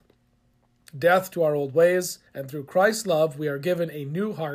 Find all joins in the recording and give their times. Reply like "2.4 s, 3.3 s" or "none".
2.3 s